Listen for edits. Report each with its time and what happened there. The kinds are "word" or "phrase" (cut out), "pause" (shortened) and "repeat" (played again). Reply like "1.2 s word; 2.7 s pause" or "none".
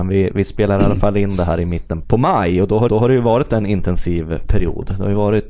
2.0 s word; 2.9 s repeat